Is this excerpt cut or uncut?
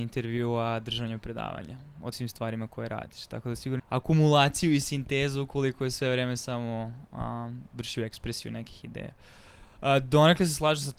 cut